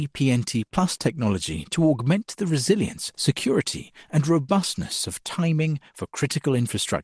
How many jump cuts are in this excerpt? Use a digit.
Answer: 0